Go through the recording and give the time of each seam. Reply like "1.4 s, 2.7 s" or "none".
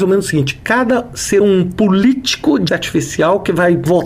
1.4 s, 2.7 s

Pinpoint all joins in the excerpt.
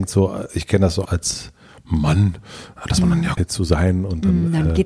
1.0 s, 3.4 s

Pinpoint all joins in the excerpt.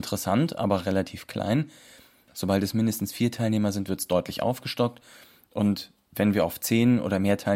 none

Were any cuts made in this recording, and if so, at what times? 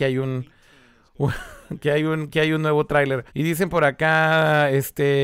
3.3 s

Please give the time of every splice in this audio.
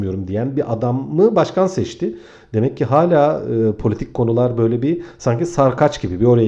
none

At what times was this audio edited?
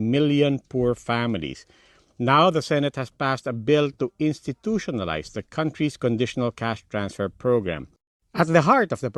none

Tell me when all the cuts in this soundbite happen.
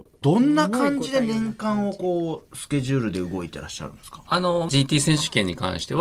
4.7 s

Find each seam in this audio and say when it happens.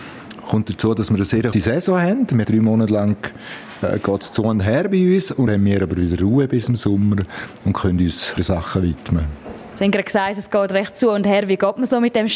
1.5 s, 2.4 s, 5.5 s, 8.4 s

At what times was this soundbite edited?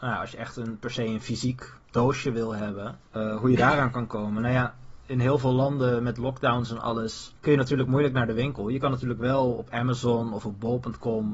1.8 s, 3.1 s, 7.4 s

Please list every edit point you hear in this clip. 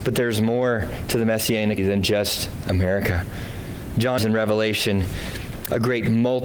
1.8 s, 4.2 s

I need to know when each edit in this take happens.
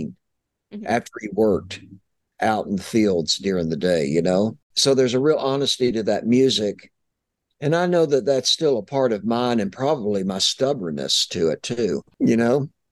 none

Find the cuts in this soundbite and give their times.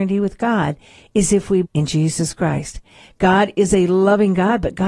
1.6 s

